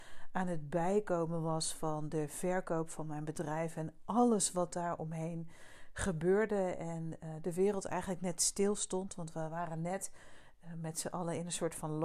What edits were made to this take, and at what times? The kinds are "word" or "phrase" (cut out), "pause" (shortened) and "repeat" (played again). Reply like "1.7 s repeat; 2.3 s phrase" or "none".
none